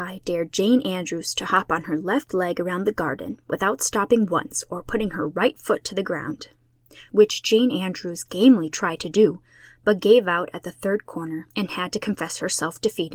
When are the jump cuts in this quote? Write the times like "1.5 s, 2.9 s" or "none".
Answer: 11.5 s